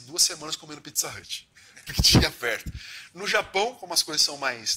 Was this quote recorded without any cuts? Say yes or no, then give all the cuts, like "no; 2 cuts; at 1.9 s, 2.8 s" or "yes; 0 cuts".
no; 1 cut; at 1.9 s